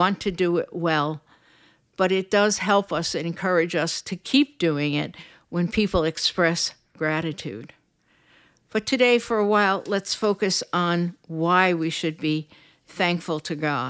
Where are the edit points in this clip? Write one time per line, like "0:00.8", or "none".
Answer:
none